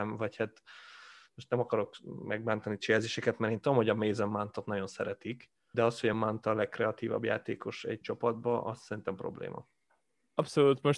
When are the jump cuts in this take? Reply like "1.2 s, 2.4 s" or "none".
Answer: 5.7 s, 6.1 s, 8.0 s